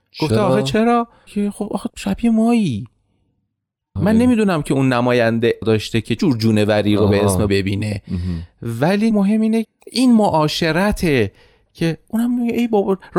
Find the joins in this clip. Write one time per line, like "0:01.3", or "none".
0:01.3
0:01.9
0:04.0
0:05.6
0:06.2
0:07.5
0:09.1
0:09.6